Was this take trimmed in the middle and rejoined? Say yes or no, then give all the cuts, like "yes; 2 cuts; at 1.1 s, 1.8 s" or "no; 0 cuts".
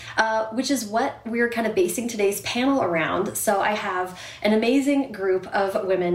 no; 0 cuts